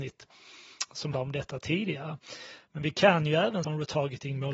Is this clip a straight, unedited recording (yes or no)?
no